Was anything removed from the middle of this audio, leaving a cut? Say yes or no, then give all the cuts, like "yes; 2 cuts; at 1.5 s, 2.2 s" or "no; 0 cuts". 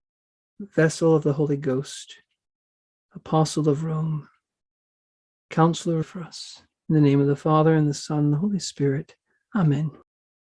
yes; 2 cuts; at 6.0 s, 6.7 s